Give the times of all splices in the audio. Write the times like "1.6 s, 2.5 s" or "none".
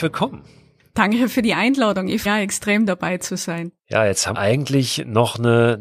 2.3 s, 3.8 s, 4.3 s